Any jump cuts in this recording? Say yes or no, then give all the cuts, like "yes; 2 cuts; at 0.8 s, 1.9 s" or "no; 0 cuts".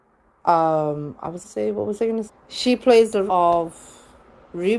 yes; 3 cuts; at 1.4 s, 2.3 s, 3.3 s